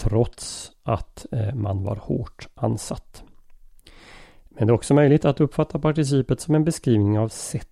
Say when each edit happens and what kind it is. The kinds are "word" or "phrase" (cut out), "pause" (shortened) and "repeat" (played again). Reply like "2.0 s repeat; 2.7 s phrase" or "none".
none